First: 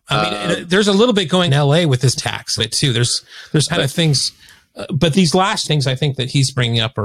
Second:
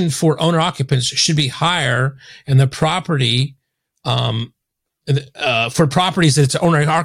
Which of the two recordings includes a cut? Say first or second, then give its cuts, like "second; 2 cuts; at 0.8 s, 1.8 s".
first; 6 cuts; at 1.5 s, 2.2 s, 2.6 s, 3.7 s, 5.1 s, 5.6 s